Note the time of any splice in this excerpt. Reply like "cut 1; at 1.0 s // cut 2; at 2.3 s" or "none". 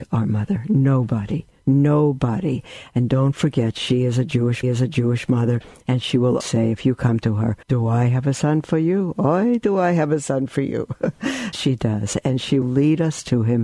cut 1; at 4.6 s // cut 2; at 6.4 s // cut 3; at 7.6 s // cut 4; at 11.5 s // cut 5; at 12.6 s